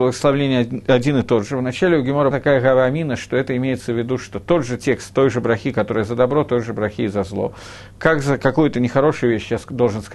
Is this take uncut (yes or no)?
no